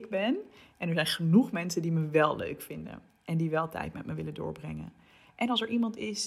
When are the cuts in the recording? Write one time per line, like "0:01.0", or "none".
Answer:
none